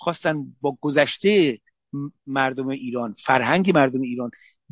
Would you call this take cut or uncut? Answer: uncut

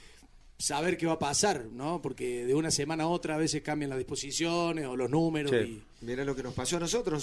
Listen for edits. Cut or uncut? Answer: uncut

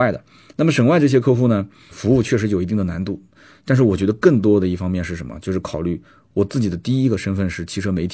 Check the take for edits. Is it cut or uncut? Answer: cut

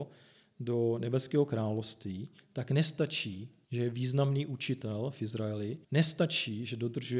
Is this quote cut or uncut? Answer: cut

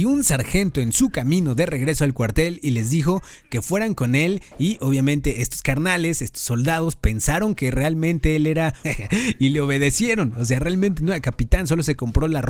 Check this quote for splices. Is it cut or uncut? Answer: cut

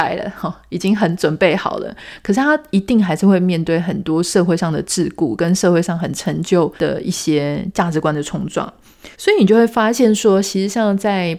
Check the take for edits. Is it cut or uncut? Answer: cut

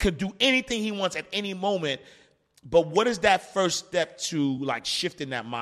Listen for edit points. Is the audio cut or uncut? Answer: uncut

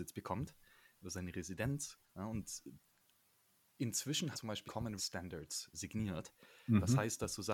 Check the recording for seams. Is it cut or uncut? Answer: cut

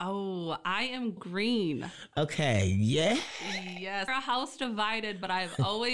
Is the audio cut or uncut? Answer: cut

